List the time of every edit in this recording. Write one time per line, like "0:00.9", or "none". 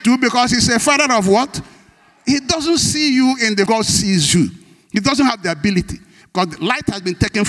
0:03.7